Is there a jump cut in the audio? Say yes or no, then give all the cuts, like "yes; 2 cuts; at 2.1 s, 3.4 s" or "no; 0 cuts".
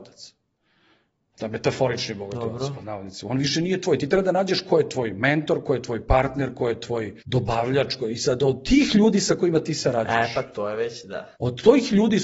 yes; 2 cuts; at 7.2 s, 11.3 s